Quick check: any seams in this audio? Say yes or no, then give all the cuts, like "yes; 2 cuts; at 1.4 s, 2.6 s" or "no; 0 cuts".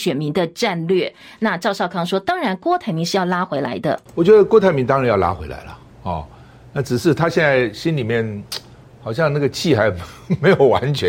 no; 0 cuts